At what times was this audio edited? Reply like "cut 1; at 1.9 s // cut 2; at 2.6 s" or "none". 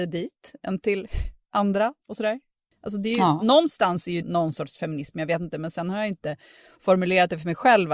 cut 1; at 2.0 s // cut 2; at 4.2 s